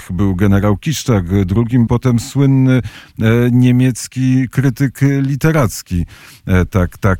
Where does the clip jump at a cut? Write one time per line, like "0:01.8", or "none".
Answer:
0:01.9